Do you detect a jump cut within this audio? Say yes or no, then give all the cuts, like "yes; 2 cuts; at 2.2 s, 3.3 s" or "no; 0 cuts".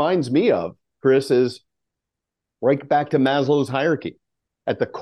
no; 0 cuts